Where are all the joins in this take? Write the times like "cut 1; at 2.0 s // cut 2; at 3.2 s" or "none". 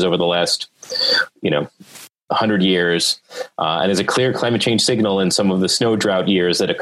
cut 1; at 2.2 s